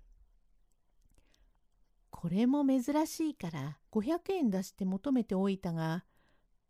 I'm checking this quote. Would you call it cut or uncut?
cut